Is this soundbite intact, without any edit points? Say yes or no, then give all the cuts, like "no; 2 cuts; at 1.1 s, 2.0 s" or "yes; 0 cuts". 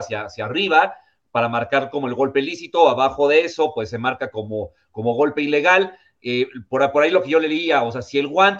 yes; 0 cuts